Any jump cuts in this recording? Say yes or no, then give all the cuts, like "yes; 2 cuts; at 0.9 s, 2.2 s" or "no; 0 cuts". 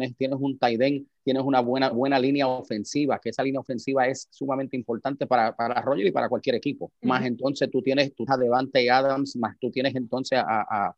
yes; 4 cuts; at 1.2 s, 1.9 s, 6.9 s, 8.3 s